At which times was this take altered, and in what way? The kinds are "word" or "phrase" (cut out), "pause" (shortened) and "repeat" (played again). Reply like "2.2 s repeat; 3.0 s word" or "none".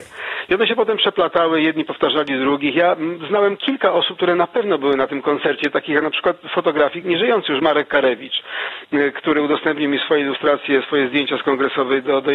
7.0 s word